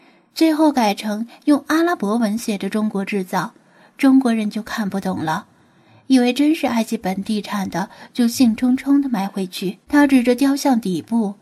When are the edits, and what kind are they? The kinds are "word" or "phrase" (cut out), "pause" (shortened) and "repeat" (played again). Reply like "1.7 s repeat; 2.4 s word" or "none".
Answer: 9.8 s pause